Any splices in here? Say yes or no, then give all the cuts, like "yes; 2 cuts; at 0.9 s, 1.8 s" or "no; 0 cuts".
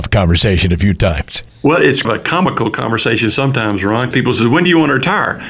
yes; 3 cuts; at 1.5 s, 2.0 s, 4.1 s